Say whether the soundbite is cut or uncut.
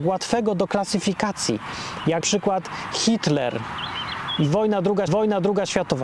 cut